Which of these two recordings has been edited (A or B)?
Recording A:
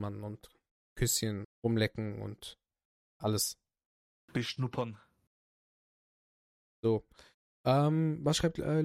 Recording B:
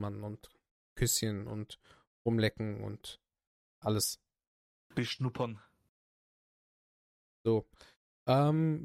A